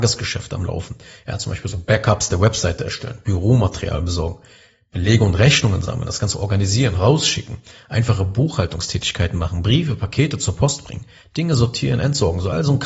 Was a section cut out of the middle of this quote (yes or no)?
no